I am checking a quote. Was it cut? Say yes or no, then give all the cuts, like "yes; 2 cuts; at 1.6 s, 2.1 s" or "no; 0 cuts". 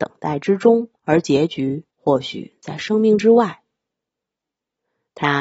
yes; 2 cuts; at 1.0 s, 1.9 s